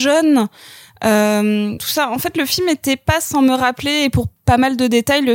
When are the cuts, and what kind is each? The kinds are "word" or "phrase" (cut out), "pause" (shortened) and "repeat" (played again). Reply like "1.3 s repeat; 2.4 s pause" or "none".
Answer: 1.8 s phrase